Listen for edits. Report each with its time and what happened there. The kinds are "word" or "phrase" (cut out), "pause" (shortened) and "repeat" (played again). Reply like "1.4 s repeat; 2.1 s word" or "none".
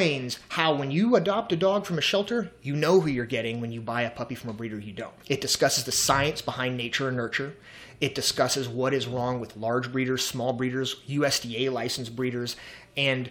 5.2 s pause